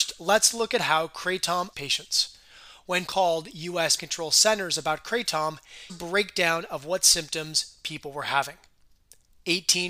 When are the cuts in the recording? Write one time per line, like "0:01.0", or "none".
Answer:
0:01.7
0:03.1
0:04.0
0:05.9